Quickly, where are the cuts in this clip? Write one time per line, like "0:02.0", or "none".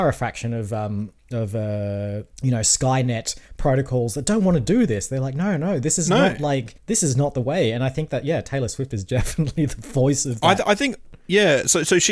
0:02.3
0:06.8